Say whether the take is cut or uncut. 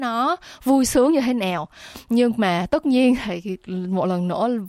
uncut